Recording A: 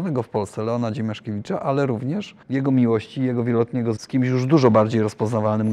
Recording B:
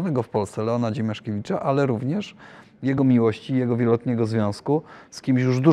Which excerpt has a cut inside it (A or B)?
A